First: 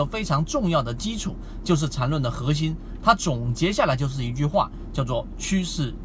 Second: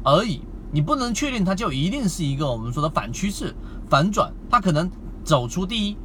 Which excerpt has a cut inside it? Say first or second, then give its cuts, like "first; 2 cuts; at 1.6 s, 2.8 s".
second; 1 cut; at 4.5 s